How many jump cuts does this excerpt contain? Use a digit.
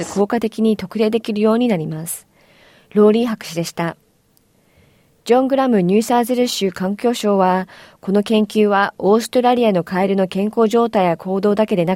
0